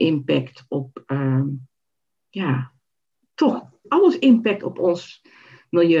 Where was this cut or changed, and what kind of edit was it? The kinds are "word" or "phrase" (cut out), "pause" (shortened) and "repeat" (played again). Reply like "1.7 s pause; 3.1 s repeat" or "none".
3.8 s word